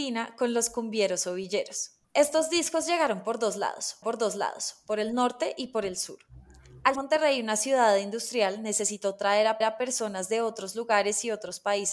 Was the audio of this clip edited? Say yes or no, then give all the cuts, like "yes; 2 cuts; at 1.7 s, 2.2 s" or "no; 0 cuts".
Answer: yes; 4 cuts; at 2.0 s, 4.0 s, 7.0 s, 9.6 s